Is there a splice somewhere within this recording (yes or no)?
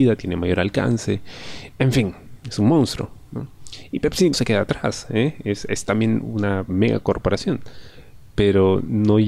yes